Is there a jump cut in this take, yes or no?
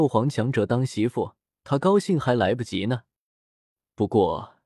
no